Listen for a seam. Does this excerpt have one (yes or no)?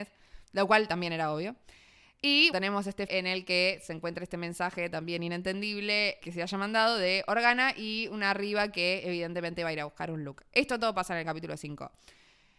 yes